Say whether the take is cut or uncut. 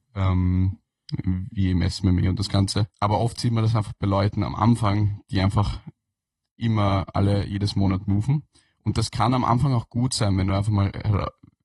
uncut